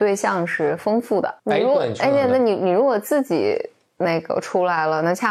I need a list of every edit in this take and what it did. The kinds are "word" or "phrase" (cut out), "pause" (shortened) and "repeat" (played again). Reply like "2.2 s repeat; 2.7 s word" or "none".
1.4 s pause